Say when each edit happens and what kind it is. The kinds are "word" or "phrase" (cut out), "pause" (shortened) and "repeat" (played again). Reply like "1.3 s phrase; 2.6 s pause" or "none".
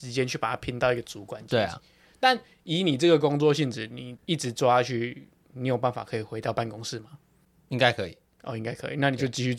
none